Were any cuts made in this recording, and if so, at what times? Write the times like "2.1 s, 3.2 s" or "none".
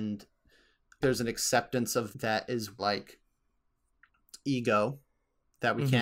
1.0 s, 2.1 s, 2.8 s

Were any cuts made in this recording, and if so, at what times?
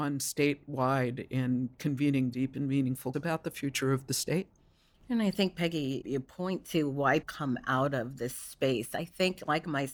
2.3 s, 3.1 s, 7.2 s

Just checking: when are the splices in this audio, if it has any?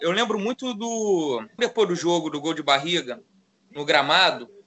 1.6 s

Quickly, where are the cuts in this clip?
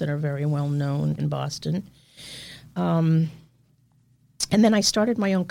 1.2 s

